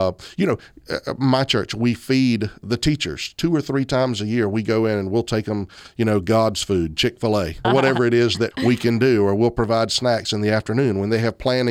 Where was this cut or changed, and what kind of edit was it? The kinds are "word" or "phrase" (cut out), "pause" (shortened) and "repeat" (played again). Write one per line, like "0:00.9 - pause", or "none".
0:02.6 - word
0:07.6 - word
0:08.5 - word